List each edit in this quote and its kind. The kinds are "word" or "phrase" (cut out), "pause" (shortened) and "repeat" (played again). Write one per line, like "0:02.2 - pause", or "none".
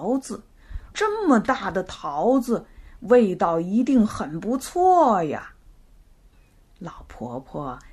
0:00.9 - phrase